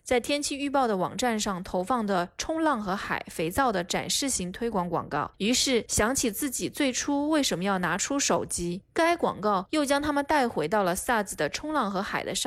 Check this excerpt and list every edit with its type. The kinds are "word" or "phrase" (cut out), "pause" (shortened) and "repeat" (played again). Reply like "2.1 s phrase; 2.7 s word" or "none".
none